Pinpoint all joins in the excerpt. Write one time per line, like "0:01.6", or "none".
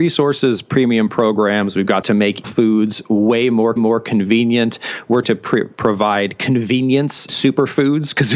0:02.0
0:02.4
0:03.8
0:05.2
0:07.3